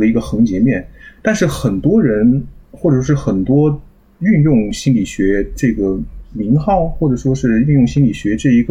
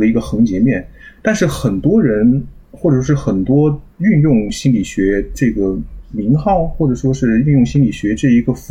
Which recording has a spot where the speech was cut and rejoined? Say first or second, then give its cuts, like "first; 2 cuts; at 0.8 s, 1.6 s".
second; 1 cut; at 3.9 s